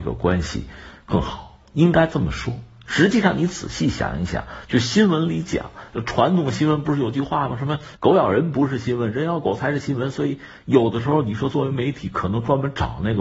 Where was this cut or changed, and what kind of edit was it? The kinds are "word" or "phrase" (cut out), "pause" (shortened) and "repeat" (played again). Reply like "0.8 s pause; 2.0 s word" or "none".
11.5 s phrase